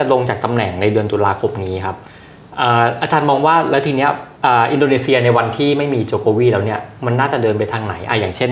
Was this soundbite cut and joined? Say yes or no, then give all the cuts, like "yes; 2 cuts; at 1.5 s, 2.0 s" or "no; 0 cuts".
yes; 1 cut; at 4.4 s